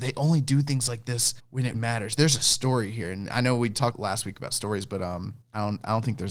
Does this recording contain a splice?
yes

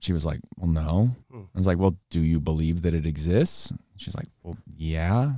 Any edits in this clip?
yes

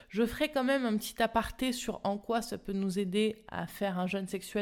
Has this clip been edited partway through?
no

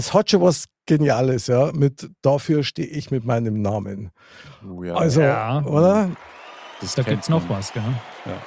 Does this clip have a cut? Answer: no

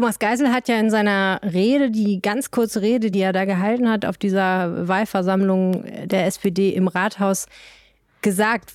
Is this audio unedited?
yes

